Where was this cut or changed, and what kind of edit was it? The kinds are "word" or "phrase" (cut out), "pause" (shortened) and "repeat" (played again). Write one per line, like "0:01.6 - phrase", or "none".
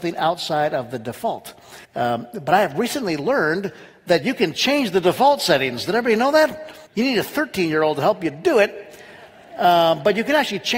0:01.8 - pause
0:06.9 - pause